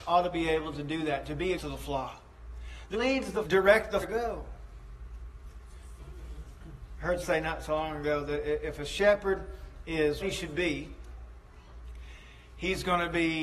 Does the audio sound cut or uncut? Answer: cut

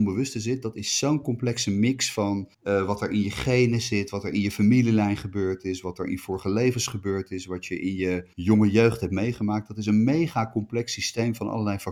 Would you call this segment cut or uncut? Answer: cut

